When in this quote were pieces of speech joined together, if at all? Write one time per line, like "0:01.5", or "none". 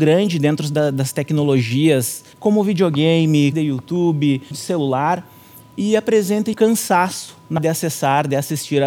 0:02.3
0:03.5
0:04.5
0:06.5
0:07.6